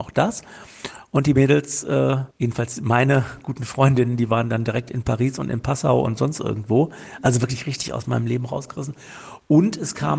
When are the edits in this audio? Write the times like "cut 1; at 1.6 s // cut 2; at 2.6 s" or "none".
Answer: cut 1; at 2.3 s